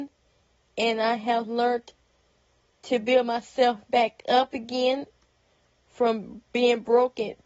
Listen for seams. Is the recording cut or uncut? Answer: uncut